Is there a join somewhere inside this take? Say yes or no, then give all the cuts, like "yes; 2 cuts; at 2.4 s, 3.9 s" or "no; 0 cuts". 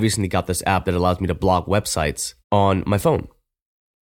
yes; 1 cut; at 2.4 s